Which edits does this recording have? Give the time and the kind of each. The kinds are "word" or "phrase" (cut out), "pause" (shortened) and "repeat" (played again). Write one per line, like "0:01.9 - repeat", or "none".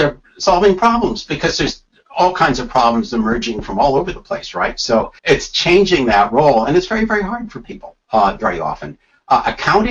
0:05.2 - pause
0:08.0 - pause